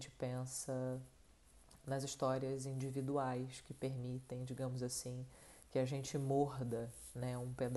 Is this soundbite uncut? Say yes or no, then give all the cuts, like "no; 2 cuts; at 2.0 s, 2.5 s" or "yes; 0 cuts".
no; 1 cut; at 1.8 s